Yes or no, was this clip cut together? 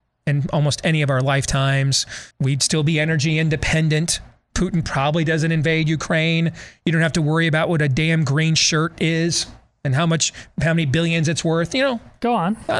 yes